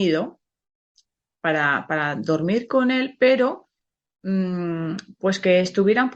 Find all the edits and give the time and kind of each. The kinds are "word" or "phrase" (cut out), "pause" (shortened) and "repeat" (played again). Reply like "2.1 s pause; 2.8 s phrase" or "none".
none

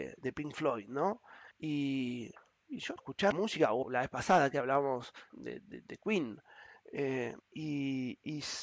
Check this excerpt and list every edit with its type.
1.5 s pause; 3.0 s word; 3.3 s word; 3.8 s word; 5.3 s word; 7.4 s pause

